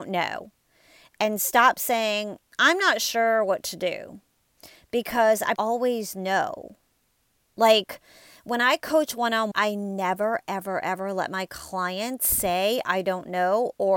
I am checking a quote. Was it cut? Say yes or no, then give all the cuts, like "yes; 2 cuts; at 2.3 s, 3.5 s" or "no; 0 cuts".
yes; 2 cuts; at 5.6 s, 9.5 s